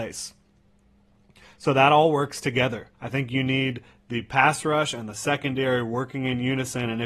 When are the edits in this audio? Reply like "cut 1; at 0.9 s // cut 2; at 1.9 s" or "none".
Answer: cut 1; at 2.9 s

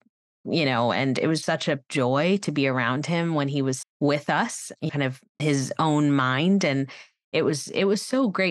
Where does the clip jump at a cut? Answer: cut 1; at 1.4 s // cut 2; at 3.8 s // cut 3; at 4.9 s // cut 4; at 5.4 s

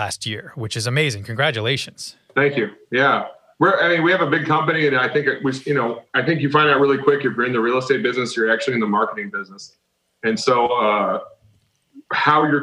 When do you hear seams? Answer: none

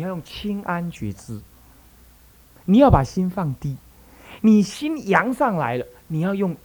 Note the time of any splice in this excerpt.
none

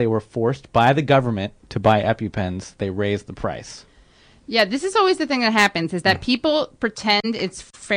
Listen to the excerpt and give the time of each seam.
none

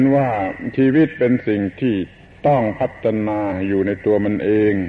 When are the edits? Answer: none

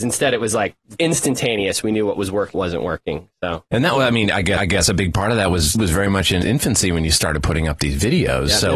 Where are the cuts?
cut 1; at 1.0 s // cut 2; at 2.5 s // cut 3; at 3.7 s // cut 4; at 4.6 s // cut 5; at 5.7 s // cut 6; at 6.4 s

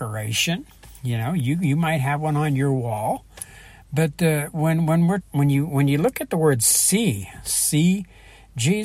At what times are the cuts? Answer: cut 1; at 5.2 s

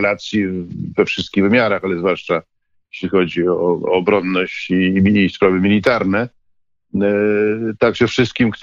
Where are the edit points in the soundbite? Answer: none

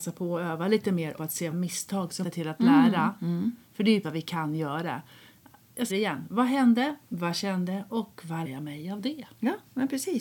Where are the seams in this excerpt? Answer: cut 1; at 1.2 s // cut 2; at 1.5 s // cut 3; at 2.2 s // cut 4; at 4.0 s // cut 5; at 5.9 s // cut 6; at 8.4 s

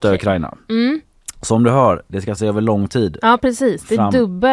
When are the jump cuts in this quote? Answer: cut 1; at 2.4 s

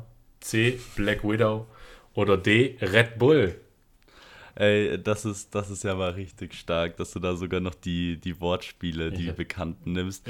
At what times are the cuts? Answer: none

